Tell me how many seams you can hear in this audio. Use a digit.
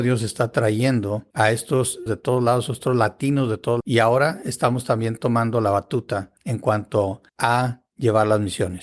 5